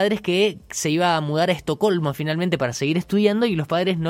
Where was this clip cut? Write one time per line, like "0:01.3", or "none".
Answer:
none